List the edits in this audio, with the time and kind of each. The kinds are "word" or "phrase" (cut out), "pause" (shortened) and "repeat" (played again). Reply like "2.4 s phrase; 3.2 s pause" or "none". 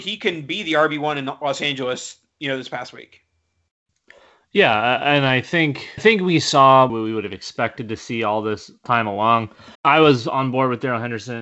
6.0 s word; 6.9 s word; 9.7 s pause